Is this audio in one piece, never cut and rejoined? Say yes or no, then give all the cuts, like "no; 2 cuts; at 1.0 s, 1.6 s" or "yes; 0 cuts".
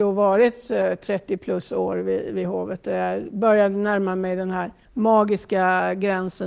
no; 1 cut; at 4.8 s